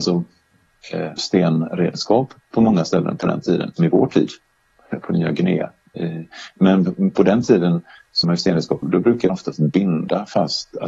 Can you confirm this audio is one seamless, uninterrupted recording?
no; 5 cuts; at 1.2 s, 3.8 s, 8.2 s, 8.8 s, 9.3 s

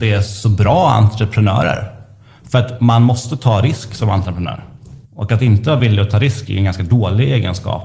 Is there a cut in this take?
no; 0 cuts

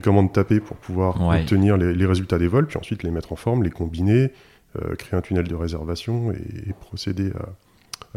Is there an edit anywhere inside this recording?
no; 0 cuts

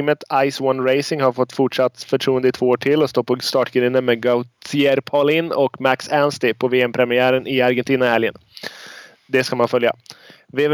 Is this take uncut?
yes; 0 cuts

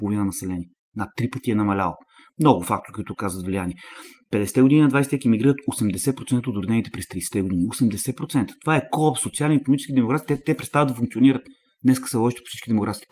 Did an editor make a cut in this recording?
no; 0 cuts

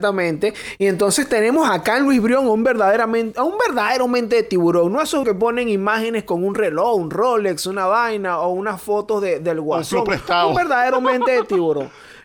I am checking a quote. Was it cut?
yes; 1 cut; at 5.2 s

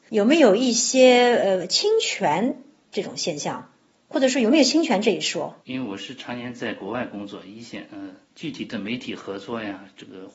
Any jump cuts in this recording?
yes; 2 cuts; at 5.6 s, 8.2 s

